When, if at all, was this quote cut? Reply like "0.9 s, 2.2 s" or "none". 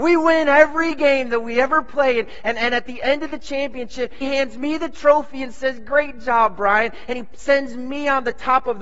4.2 s